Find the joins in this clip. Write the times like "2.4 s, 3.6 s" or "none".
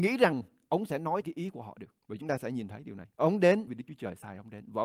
1.2 s, 2.0 s, 3.1 s, 3.7 s

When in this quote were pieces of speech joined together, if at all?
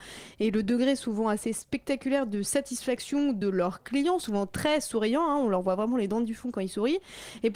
none

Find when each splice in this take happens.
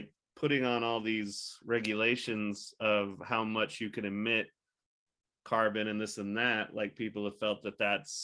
none

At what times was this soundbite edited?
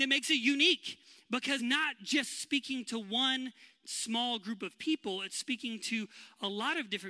1.6 s

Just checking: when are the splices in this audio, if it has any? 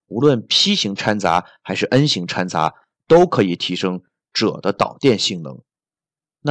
none

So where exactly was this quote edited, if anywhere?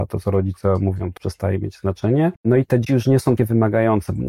1.2 s, 2.4 s, 2.9 s, 3.4 s

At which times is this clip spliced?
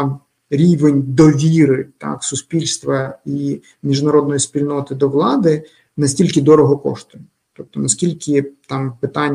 none

